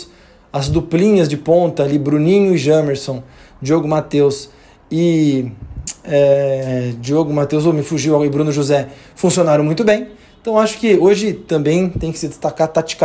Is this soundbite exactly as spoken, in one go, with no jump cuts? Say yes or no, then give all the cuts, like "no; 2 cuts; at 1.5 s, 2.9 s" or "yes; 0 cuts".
yes; 0 cuts